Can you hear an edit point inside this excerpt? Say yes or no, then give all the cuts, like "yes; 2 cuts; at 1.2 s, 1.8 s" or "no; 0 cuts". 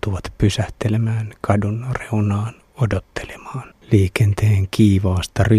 yes; 1 cut; at 3.8 s